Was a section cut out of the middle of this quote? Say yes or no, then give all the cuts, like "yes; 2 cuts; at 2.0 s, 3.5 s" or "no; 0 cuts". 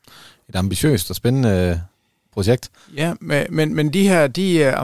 no; 0 cuts